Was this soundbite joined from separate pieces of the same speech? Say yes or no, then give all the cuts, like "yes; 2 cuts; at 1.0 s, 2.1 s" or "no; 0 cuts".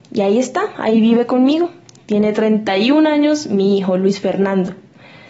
no; 0 cuts